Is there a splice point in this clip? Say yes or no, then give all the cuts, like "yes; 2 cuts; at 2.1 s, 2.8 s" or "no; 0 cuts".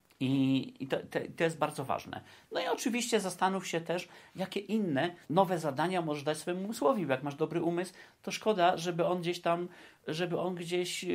yes; 1 cut; at 5.2 s